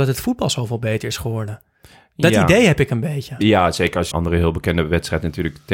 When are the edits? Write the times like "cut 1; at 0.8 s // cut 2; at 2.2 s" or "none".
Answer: cut 1; at 4.1 s